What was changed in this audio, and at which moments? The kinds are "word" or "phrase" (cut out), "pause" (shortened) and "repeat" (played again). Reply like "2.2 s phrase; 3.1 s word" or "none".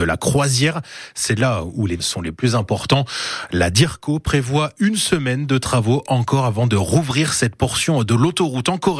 2.0 s word

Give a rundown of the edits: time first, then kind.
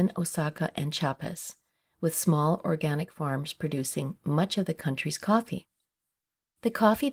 none

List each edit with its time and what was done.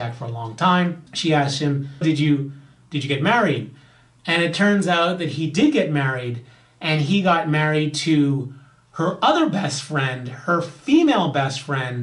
1.1 s pause; 2.0 s word

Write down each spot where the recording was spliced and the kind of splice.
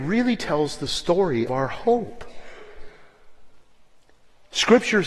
1.5 s word

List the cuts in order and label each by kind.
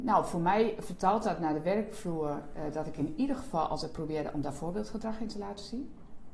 none

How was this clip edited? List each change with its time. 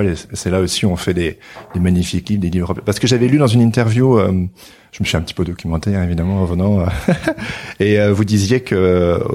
none

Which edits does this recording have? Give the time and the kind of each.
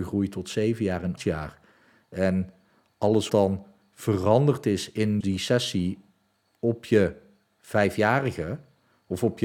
1.2 s word; 3.3 s word; 5.2 s word

